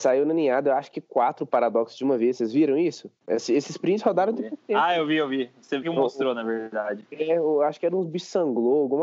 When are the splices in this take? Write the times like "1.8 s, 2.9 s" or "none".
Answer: 3.2 s, 5.8 s